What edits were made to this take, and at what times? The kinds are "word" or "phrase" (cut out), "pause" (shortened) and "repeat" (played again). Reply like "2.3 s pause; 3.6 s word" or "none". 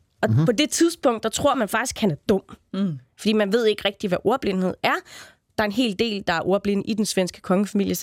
none

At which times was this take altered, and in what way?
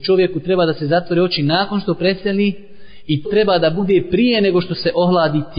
3.2 s word

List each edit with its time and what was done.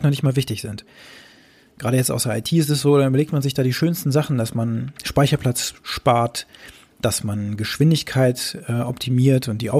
none

